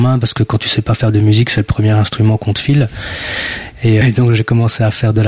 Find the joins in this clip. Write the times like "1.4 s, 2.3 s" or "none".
4.0 s